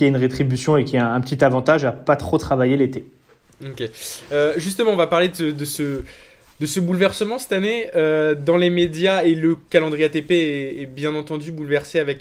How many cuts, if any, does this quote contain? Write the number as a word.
zero